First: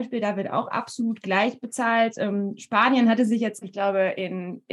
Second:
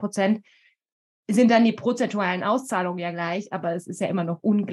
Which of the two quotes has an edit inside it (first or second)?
first